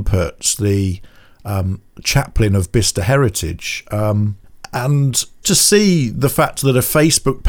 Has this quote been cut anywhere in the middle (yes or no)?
yes